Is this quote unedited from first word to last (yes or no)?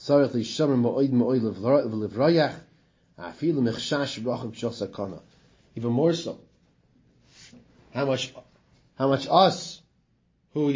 yes